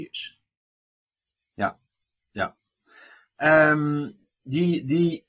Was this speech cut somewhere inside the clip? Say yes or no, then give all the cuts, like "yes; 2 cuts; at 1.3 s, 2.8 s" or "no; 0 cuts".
no; 0 cuts